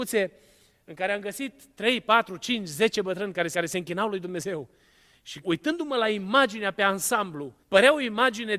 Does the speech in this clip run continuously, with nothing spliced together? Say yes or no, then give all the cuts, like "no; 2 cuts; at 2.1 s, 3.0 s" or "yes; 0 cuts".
no; 3 cuts; at 3.5 s, 5.4 s, 7.6 s